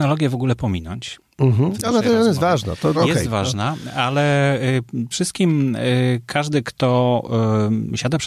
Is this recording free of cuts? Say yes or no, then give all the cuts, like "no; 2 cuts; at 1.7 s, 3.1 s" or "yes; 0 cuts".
no; 2 cuts; at 2.9 s, 5.1 s